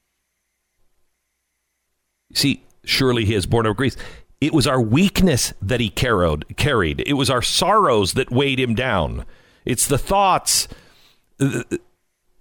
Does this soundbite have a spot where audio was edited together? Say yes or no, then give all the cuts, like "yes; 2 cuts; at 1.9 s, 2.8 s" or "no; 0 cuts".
no; 0 cuts